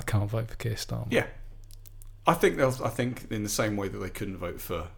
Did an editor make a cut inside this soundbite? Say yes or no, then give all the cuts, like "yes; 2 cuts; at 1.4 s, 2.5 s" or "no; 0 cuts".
yes; 1 cut; at 2.1 s